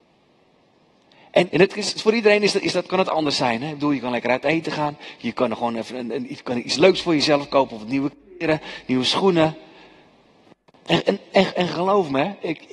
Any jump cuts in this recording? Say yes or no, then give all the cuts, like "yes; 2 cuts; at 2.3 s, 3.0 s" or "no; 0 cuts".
yes; 1 cut; at 1.5 s